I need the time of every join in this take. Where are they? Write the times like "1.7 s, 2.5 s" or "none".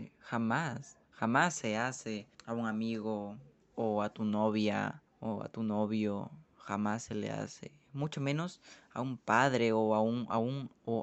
1.0 s, 2.3 s, 3.6 s, 5.1 s